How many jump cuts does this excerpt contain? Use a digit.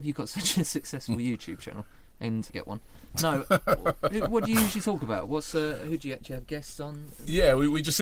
1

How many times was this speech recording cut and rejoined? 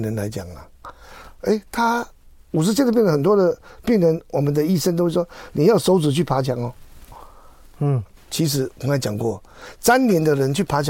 1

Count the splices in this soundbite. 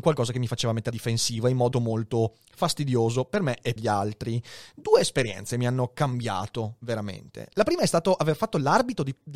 3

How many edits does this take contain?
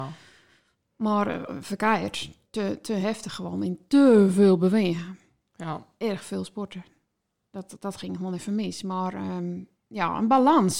0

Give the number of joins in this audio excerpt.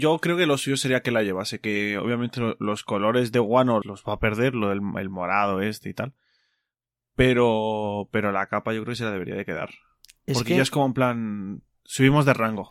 1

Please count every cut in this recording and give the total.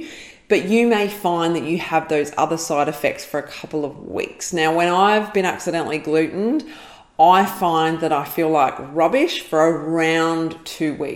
0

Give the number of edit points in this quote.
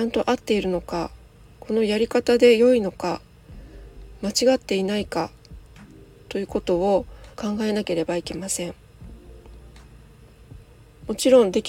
1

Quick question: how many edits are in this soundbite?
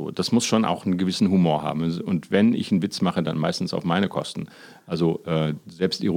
0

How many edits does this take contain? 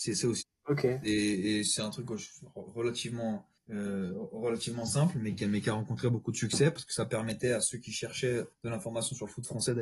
2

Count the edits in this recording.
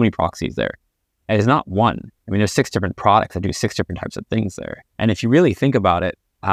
2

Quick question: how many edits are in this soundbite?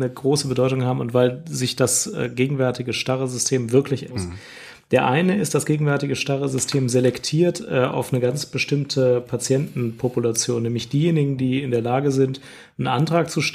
1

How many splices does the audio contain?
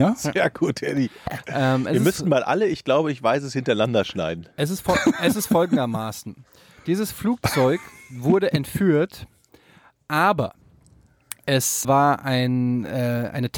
1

